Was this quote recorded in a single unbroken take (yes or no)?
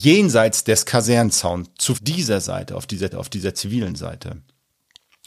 no